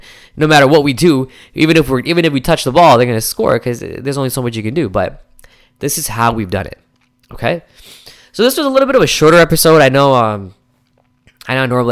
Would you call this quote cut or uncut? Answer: uncut